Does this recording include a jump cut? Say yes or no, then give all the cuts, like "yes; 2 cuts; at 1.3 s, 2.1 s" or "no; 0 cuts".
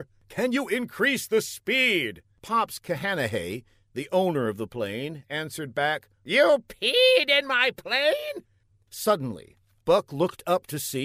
no; 0 cuts